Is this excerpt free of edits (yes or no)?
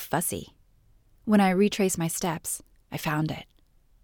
yes